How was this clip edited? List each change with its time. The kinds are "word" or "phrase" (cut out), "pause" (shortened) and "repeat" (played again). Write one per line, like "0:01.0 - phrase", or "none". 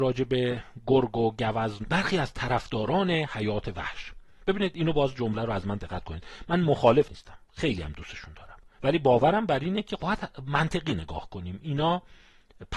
0:01.8 - phrase
0:07.0 - phrase
0:08.7 - pause
0:10.0 - word